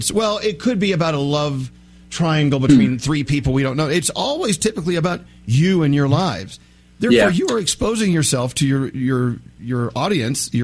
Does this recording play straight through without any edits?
yes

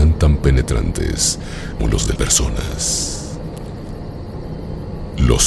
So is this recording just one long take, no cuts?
no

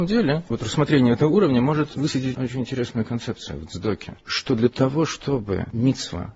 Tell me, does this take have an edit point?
yes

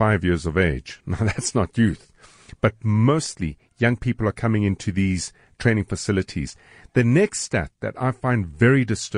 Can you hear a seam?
no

